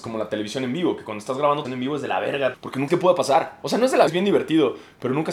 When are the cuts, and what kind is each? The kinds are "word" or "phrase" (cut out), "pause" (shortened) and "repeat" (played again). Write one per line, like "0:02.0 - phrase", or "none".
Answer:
0:01.6 - word
0:02.5 - word
0:02.9 - word
0:04.1 - word